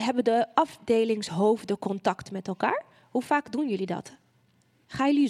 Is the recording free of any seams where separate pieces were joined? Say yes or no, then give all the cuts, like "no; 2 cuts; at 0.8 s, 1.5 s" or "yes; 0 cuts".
yes; 0 cuts